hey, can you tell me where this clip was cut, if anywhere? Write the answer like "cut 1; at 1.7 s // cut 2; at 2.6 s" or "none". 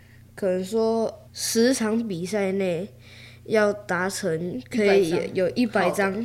cut 1; at 1.3 s